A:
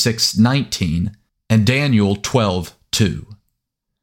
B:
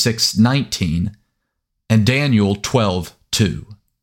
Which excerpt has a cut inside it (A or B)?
A